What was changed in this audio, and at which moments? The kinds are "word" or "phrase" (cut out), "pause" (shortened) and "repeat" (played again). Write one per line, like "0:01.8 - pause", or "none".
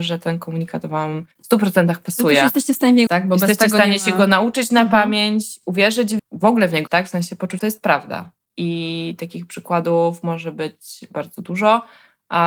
0:01.3 - pause
0:03.1 - word
0:06.2 - word
0:06.9 - word
0:07.6 - phrase